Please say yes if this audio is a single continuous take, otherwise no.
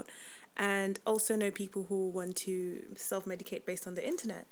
yes